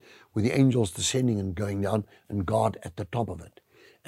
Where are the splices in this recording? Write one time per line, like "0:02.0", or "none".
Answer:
none